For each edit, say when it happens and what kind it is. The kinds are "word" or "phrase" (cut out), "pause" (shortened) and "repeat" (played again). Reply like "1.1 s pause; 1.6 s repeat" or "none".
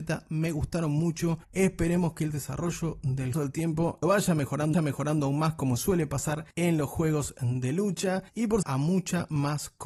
1.4 s pause; 3.3 s phrase; 4.0 s word; 4.7 s repeat; 6.5 s pause; 8.3 s pause; 8.6 s phrase